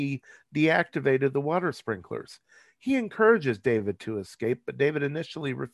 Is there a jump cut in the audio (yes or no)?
no